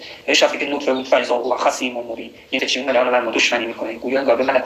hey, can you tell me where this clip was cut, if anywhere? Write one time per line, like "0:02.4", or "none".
0:02.6